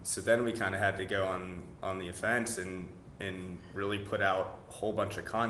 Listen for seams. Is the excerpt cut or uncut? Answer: uncut